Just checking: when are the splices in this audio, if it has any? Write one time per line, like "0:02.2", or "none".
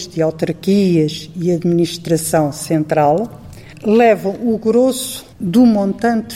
0:05.3